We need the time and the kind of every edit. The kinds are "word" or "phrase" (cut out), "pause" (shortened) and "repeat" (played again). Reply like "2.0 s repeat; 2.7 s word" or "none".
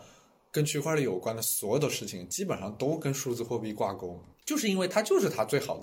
4.3 s pause